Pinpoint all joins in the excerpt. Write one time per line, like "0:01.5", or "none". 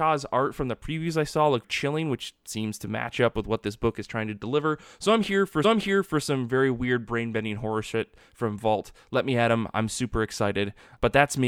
0:01.6
0:05.6